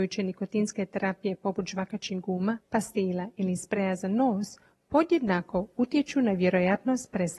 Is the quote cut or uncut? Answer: uncut